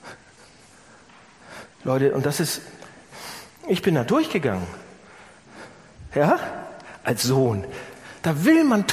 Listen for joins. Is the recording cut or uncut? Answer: cut